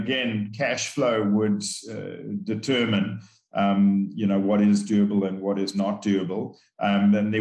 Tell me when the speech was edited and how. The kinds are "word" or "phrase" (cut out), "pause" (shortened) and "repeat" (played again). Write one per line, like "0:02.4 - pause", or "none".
none